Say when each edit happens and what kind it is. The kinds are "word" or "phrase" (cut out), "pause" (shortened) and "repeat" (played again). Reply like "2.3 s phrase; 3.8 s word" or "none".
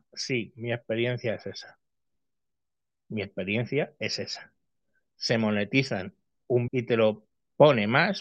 6.7 s word